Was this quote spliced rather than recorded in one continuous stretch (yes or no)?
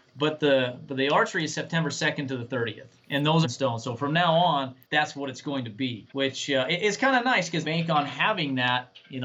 yes